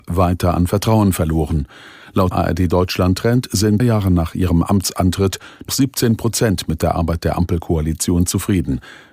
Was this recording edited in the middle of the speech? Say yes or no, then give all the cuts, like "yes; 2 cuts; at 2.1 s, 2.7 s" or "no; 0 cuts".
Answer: yes; 3 cuts; at 2.3 s, 3.8 s, 5.7 s